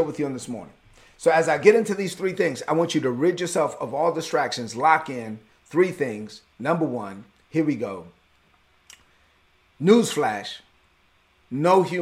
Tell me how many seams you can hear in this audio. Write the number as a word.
zero